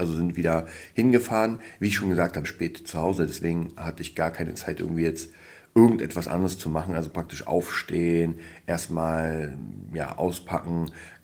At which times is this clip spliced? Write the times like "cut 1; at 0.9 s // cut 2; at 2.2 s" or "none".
cut 1; at 2.4 s

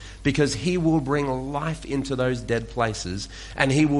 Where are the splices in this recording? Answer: none

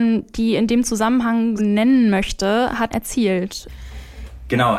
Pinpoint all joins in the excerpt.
cut 1; at 1.6 s // cut 2; at 2.9 s

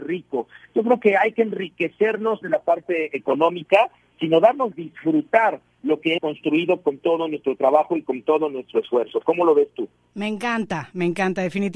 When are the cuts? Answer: cut 1; at 2.4 s // cut 2; at 4.7 s // cut 3; at 6.2 s

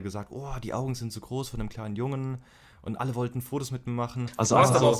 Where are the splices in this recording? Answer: none

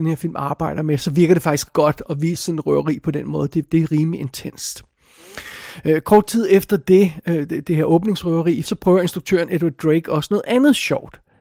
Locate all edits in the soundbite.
cut 1; at 1.7 s // cut 2; at 8.6 s

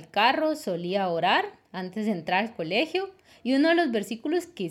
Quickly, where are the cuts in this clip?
none

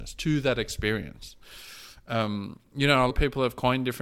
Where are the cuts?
cut 1; at 3.1 s

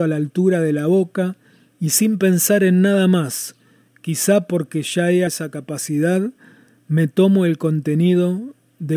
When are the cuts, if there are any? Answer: cut 1; at 5.3 s

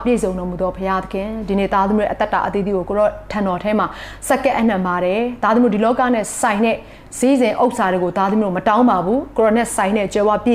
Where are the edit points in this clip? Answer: none

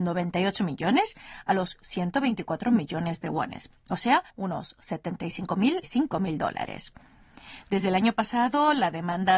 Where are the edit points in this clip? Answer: cut 1; at 4.3 s // cut 2; at 5.8 s

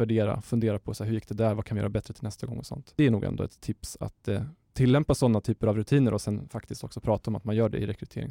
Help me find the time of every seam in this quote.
none

